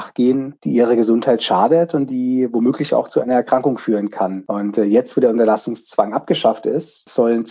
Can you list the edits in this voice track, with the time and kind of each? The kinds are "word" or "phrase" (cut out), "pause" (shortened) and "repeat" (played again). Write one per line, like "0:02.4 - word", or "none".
none